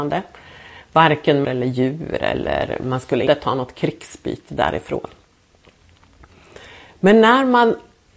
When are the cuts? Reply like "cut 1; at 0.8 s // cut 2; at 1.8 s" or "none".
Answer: cut 1; at 1.4 s // cut 2; at 3.3 s